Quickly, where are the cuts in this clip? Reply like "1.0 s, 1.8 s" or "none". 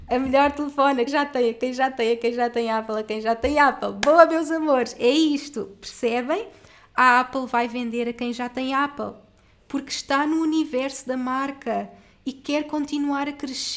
1.1 s